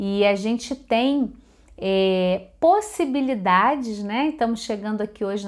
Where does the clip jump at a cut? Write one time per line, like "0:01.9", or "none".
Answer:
none